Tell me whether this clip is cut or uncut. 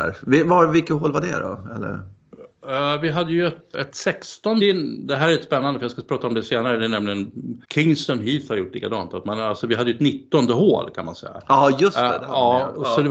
cut